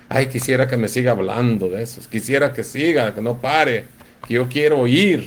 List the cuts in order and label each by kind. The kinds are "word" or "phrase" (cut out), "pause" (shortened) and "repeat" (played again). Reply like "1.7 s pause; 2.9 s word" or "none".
none